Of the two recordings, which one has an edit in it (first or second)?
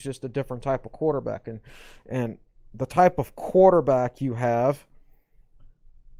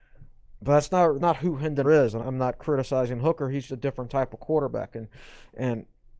second